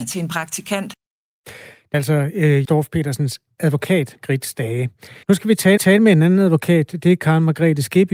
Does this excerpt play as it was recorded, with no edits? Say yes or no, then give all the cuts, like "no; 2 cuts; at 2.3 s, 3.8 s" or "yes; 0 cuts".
no; 5 cuts; at 1.9 s, 2.6 s, 4.2 s, 5.2 s, 5.8 s